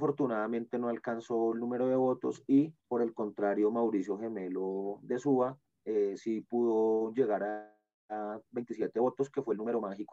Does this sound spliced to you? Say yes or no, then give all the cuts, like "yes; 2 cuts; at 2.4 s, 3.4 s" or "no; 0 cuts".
yes; 3 cuts; at 2.8 s, 5.7 s, 7.9 s